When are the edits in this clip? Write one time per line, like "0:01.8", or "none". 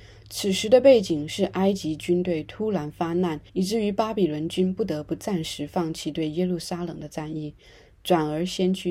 0:03.5